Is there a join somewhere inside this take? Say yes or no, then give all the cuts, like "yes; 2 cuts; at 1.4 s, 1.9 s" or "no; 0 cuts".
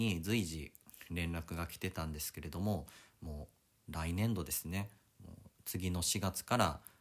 no; 0 cuts